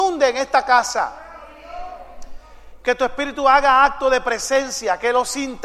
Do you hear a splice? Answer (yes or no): no